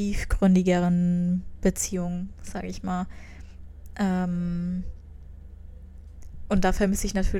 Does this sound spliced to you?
no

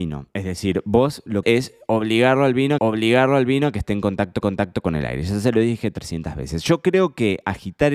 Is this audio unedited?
no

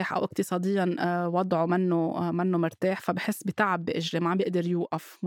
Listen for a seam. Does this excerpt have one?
no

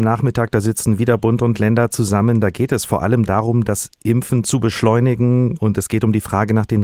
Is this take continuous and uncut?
yes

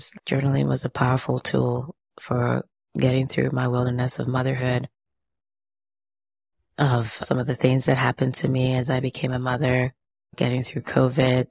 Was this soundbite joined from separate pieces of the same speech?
yes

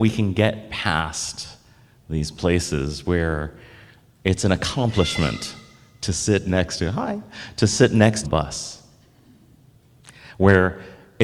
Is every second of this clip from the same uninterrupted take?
no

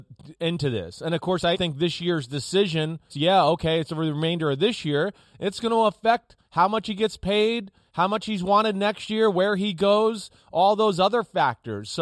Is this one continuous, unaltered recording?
no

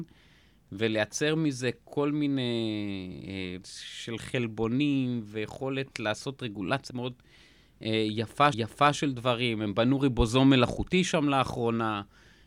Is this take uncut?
no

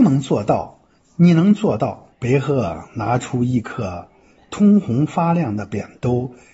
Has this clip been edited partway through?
yes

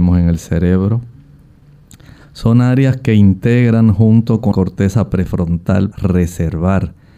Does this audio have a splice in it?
yes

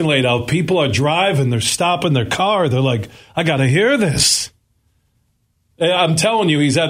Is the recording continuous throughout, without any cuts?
yes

